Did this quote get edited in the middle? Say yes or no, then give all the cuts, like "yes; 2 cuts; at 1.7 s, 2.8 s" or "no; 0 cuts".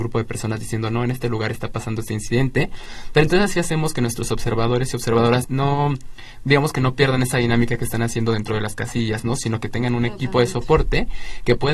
yes; 1 cut; at 5.4 s